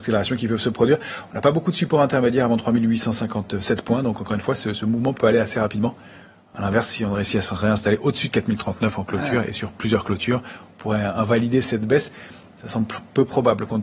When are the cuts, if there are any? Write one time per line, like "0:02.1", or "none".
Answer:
0:05.1